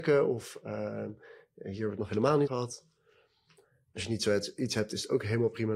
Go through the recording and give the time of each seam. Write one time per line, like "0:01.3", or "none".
0:02.5

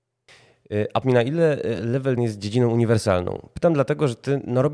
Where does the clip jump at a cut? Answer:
0:01.0
0:02.2

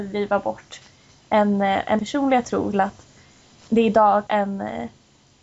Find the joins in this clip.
0:02.0
0:02.7
0:04.3

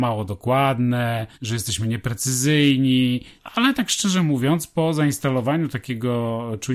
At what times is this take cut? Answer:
0:01.3
0:03.4

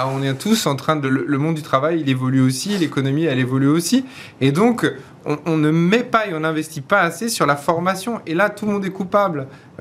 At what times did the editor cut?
none

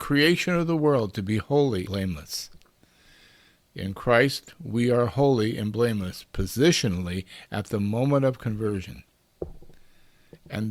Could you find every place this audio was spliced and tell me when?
0:01.9

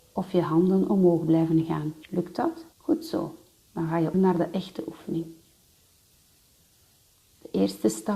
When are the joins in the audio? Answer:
0:02.0
0:02.7
0:04.1

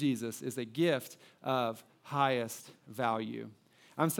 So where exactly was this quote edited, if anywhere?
none

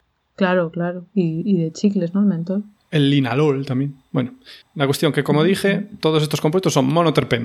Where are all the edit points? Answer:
0:04.6

